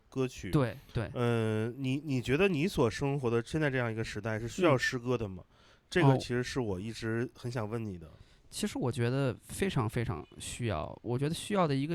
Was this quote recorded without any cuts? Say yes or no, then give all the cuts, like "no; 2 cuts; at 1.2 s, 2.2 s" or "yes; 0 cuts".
yes; 0 cuts